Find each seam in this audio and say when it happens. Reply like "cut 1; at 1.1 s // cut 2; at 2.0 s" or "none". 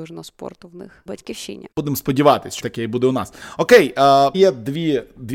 cut 1; at 1.1 s // cut 2; at 1.7 s // cut 3; at 2.6 s // cut 4; at 4.3 s